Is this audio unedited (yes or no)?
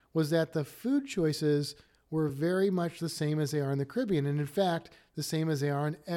yes